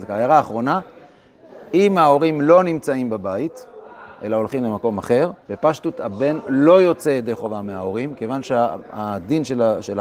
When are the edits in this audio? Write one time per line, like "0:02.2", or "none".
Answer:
0:05.4